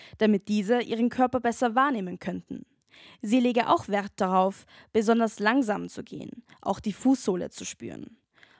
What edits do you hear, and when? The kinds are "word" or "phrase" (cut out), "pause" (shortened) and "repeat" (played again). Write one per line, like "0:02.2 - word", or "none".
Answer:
none

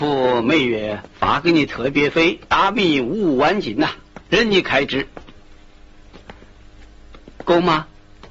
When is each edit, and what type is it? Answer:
0:01.1 - pause
0:04.2 - pause

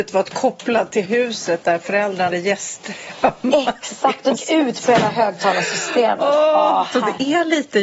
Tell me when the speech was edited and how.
0:01.1 - phrase
0:02.3 - word
0:04.4 - phrase
0:06.9 - word

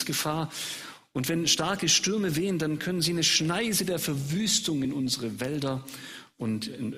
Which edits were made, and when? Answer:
none

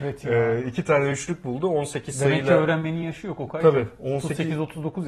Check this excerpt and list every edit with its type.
none

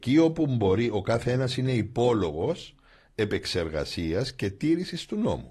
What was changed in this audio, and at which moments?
none

